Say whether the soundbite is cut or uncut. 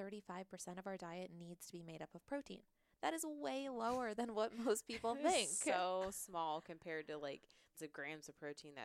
cut